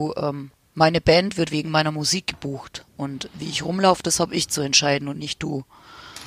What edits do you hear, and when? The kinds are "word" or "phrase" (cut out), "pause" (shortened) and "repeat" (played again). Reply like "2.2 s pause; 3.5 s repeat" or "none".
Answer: none